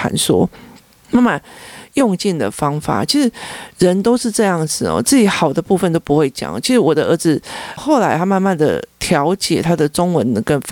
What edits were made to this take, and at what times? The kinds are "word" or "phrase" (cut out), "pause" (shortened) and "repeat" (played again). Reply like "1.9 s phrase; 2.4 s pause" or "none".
7.8 s word

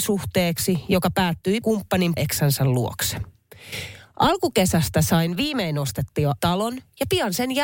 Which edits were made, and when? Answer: 1.6 s word; 2.2 s word; 6.4 s phrase

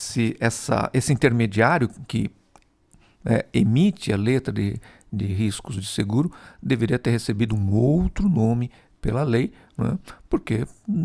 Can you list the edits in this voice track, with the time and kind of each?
none

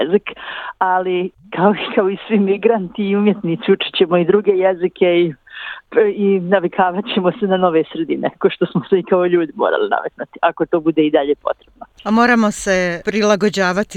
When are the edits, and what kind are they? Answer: 12.0 s pause

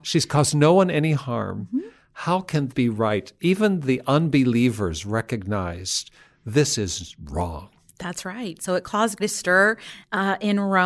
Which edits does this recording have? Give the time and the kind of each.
2.7 s word; 9.2 s word

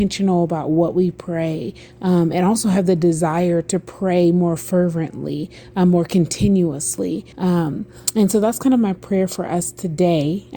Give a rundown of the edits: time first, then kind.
7.3 s pause

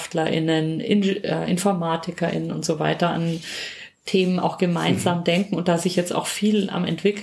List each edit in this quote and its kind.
none

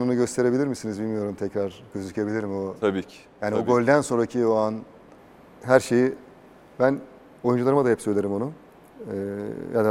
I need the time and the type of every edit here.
none

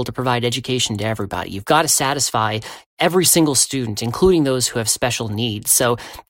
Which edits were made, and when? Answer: none

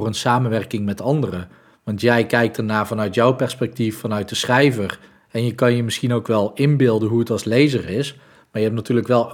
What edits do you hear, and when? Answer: none

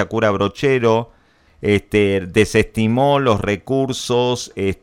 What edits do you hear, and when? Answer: 1.5 s pause

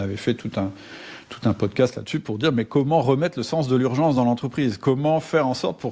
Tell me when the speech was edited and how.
none

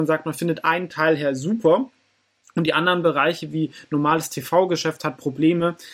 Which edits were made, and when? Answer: none

